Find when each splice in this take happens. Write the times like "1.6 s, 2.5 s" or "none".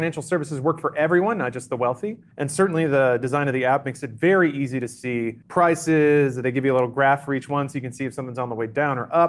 2.3 s, 5.4 s